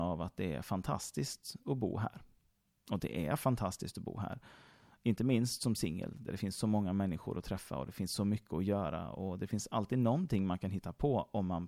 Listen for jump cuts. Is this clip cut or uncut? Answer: uncut